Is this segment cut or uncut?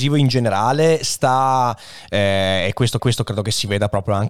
cut